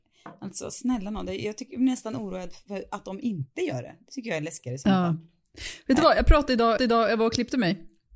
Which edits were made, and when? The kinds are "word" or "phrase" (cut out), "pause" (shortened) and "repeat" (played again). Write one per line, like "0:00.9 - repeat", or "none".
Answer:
0:06.8 - repeat